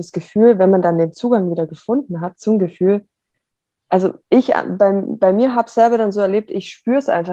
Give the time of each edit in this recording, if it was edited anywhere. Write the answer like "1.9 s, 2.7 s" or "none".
4.2 s